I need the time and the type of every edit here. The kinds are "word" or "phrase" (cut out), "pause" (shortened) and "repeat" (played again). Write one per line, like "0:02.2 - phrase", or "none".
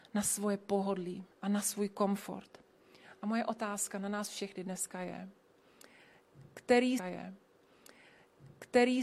0:01.3 - pause
0:07.0 - repeat